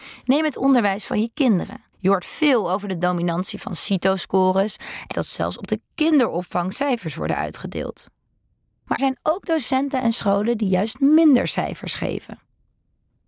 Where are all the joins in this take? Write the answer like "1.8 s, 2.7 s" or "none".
1.9 s, 5.1 s, 9.0 s